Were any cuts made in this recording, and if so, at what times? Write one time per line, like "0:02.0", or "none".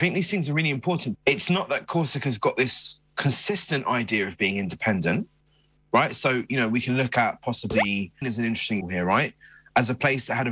0:01.1
0:08.2
0:08.8

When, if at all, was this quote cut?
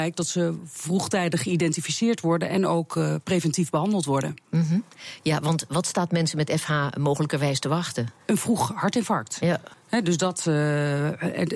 0:08.2
0:09.7

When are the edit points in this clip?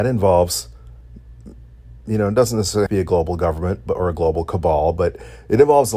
0:02.9

